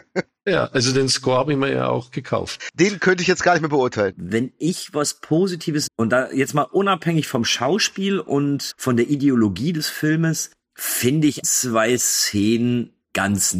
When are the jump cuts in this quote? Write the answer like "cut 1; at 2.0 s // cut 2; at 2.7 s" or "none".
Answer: cut 1; at 5.9 s // cut 2; at 8.7 s // cut 3; at 11.4 s